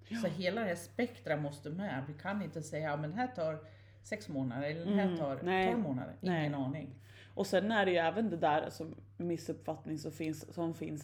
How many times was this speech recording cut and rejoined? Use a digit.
0